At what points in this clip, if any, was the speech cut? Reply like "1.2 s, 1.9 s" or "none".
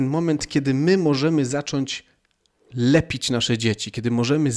none